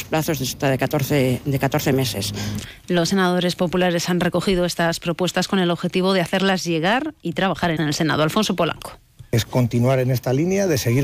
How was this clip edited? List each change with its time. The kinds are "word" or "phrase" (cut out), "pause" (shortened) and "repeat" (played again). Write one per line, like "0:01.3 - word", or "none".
0:07.8 - word